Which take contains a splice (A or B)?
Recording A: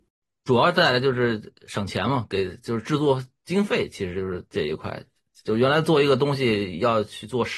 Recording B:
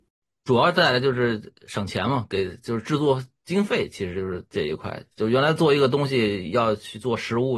B